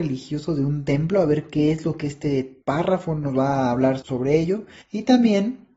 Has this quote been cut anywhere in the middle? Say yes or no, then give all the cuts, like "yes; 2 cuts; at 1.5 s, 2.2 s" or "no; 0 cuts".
yes; 3 cuts; at 2.6 s, 4.0 s, 4.8 s